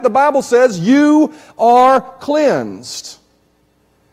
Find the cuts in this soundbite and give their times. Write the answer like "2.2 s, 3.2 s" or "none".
none